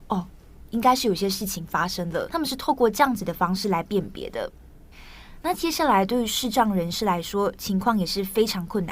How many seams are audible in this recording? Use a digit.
1